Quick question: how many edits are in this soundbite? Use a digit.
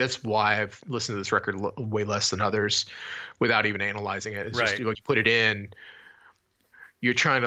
1